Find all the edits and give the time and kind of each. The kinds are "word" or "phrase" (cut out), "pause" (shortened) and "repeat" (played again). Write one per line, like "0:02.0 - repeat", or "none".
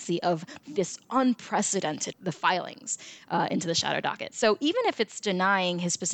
0:02.1 - phrase